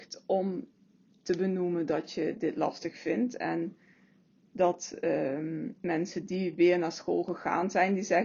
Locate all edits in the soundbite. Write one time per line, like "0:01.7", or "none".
none